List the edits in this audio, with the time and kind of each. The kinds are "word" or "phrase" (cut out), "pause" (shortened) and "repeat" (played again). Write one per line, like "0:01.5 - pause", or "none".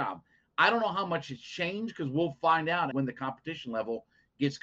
0:02.9 - word